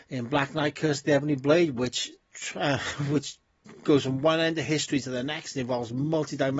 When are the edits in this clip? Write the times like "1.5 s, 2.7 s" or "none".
none